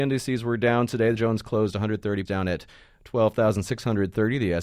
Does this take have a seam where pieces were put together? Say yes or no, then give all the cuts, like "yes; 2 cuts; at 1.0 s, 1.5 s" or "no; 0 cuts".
yes; 2 cuts; at 1.2 s, 2.3 s